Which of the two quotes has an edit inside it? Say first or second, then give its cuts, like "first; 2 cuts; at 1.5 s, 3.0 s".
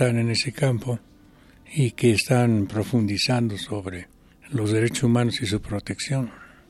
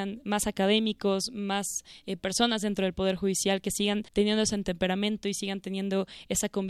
second; 1 cut; at 4.1 s